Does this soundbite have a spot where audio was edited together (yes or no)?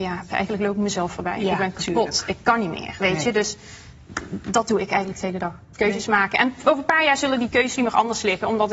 yes